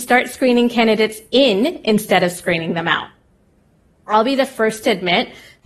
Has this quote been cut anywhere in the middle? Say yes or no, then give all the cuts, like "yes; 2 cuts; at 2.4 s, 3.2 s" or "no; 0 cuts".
no; 0 cuts